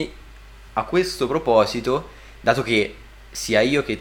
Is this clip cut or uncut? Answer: uncut